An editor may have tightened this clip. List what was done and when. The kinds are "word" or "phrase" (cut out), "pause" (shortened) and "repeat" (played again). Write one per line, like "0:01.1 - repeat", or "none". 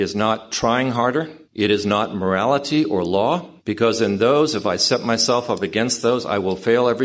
0:01.4 - pause
0:03.6 - pause